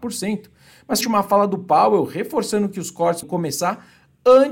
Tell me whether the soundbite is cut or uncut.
cut